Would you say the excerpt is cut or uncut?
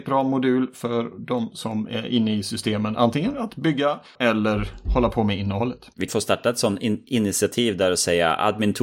cut